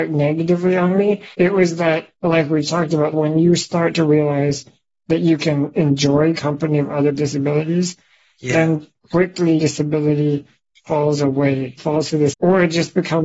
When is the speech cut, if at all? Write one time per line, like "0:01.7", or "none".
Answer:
0:01.3
0:02.2
0:03.1
0:06.3
0:07.1
0:09.6
0:11.8
0:12.3